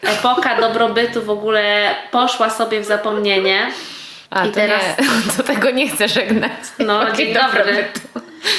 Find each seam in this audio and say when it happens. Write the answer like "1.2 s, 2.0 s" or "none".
4.3 s